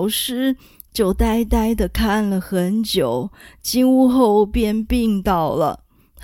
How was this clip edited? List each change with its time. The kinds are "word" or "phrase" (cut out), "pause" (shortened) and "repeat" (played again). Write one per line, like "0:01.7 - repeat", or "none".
none